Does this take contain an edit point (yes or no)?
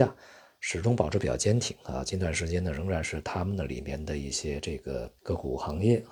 yes